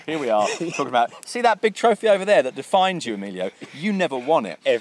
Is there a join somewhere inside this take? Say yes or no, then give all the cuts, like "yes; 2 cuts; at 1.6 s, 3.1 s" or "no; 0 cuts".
no; 0 cuts